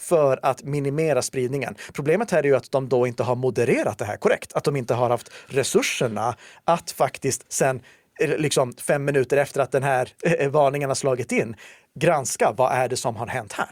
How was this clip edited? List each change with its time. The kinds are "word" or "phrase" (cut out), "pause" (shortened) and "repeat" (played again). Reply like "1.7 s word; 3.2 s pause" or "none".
none